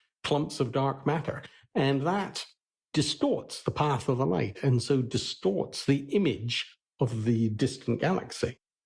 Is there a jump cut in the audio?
no; 0 cuts

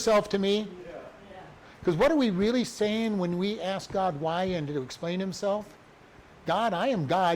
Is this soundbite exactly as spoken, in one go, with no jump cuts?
yes; 0 cuts

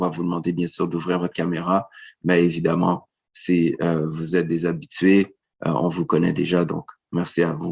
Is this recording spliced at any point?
no; 0 cuts

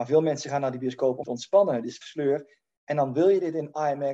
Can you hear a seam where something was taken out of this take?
yes; 2 cuts; at 1.2 s, 2.0 s

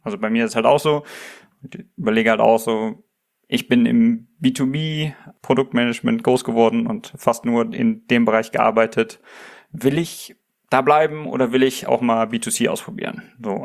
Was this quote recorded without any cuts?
yes; 0 cuts

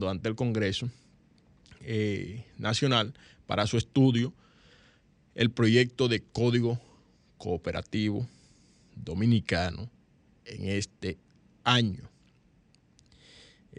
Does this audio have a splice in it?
no; 0 cuts

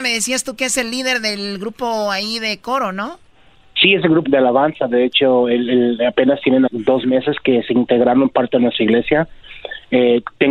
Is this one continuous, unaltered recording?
no; 2 cuts; at 4.2 s, 6.7 s

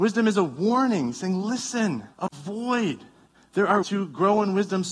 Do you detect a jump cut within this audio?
yes; 2 cuts; at 2.1 s, 3.8 s

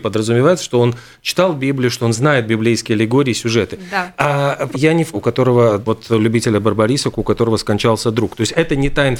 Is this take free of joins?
no; 3 cuts; at 4.7 s, 5.1 s, 5.9 s

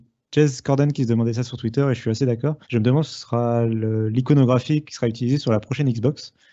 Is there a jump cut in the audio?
yes; 1 cut; at 2.6 s

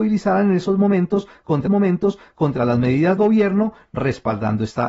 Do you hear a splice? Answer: yes; 2 cuts; at 1.7 s, 3.2 s

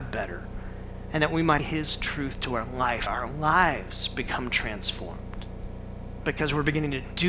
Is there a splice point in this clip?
yes; 2 cuts; at 1.6 s, 3.1 s

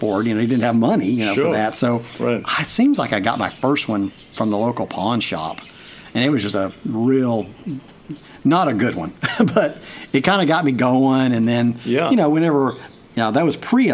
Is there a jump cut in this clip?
no; 0 cuts

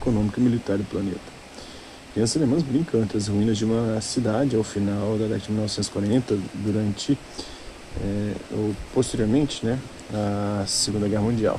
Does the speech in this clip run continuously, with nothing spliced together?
yes; 0 cuts

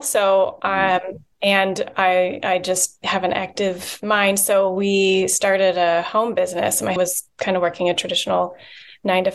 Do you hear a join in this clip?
yes; 2 cuts; at 1.3 s, 7.0 s

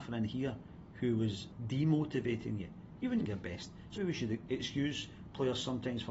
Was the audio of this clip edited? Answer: yes; 2 cuts; at 3.3 s, 4.0 s

